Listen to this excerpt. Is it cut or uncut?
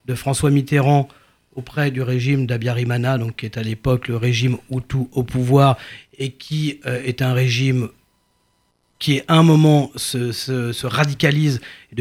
uncut